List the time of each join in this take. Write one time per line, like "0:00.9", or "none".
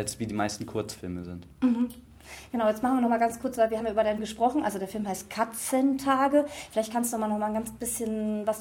0:03.8
0:04.2